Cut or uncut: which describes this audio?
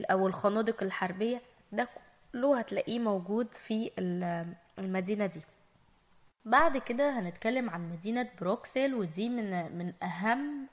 uncut